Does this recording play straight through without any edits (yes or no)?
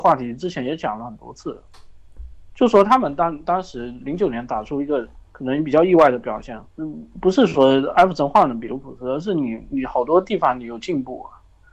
no